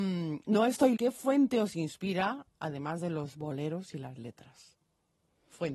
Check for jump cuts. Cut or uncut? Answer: cut